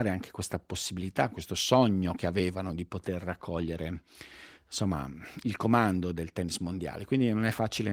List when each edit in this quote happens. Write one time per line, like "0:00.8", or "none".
none